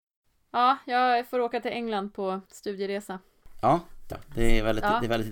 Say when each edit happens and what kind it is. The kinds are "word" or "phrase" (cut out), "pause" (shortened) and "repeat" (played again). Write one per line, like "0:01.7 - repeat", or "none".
0:02.5 - pause
0:04.1 - word